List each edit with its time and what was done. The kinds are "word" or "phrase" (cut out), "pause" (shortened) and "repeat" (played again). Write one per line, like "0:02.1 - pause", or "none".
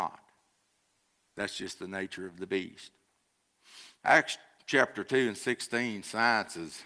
0:04.0 - pause